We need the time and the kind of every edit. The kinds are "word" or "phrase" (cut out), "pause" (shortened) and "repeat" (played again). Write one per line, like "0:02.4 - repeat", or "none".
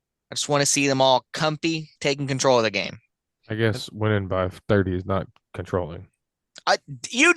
0:02.0 - pause
0:03.3 - pause